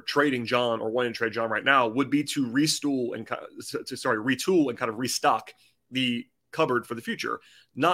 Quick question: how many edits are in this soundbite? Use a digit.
0